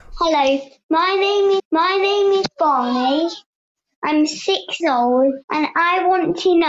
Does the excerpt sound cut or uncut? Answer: cut